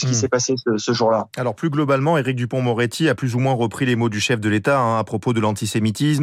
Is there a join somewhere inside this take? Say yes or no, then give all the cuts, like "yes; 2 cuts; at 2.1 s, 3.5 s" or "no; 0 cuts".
no; 0 cuts